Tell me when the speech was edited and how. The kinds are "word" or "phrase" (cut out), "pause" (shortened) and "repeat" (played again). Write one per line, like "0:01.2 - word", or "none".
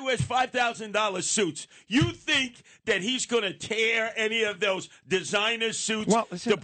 none